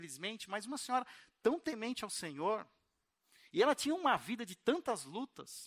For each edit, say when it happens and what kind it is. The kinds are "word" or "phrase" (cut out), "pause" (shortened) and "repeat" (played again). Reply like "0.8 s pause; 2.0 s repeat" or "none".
none